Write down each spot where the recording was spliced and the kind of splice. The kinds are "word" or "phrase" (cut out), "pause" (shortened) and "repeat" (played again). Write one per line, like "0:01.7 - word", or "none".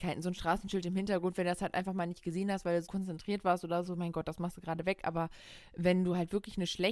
0:02.9 - word